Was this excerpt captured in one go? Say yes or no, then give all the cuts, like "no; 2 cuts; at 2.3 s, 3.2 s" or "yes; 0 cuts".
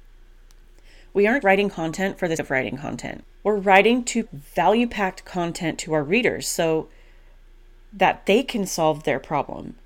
no; 3 cuts; at 1.4 s, 2.4 s, 4.2 s